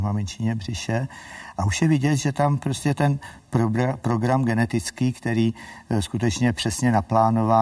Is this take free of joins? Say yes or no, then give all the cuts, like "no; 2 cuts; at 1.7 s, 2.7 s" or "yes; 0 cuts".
yes; 0 cuts